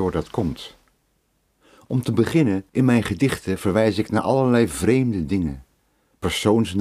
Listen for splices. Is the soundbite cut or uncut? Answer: cut